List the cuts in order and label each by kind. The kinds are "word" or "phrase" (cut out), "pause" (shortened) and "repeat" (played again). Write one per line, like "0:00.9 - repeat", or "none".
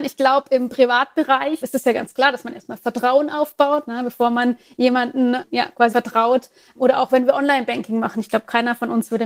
0:01.6 - word
0:05.9 - word